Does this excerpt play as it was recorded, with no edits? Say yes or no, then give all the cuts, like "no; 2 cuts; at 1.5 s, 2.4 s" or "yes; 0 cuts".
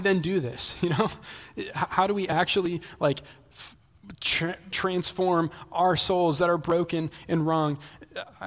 no; 1 cut; at 4.7 s